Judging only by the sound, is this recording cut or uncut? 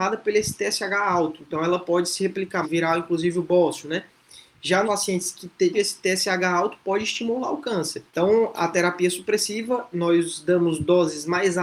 cut